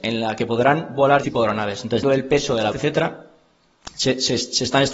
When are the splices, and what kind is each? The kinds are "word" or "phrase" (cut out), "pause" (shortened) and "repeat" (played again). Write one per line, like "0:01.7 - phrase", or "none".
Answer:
0:01.2 - word
0:02.0 - word
0:02.7 - word